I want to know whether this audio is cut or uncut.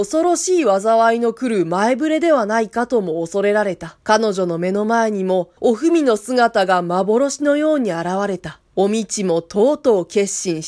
cut